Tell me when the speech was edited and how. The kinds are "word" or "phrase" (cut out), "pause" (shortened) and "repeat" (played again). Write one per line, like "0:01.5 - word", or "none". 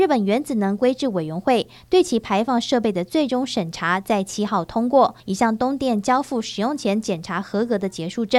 0:05.2 - pause